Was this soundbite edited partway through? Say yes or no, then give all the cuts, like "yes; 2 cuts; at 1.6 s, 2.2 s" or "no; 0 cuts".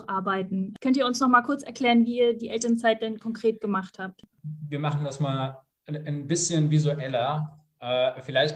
yes; 1 cut; at 4.3 s